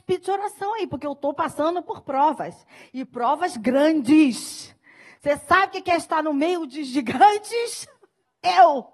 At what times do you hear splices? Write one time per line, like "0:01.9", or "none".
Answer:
none